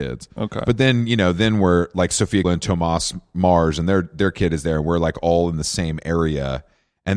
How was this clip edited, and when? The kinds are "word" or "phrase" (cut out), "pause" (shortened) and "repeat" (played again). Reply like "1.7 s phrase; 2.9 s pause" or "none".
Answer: 2.4 s word